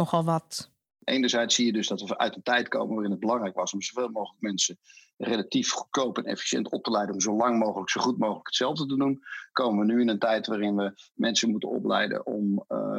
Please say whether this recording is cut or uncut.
uncut